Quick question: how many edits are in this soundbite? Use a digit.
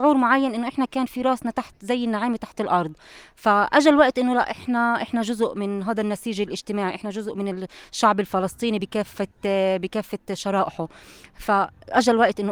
0